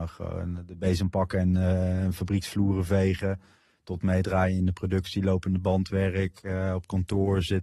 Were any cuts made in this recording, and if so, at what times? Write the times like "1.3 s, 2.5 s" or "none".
none